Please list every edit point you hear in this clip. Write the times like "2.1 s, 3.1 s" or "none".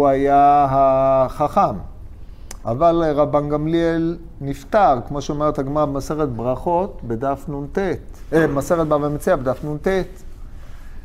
none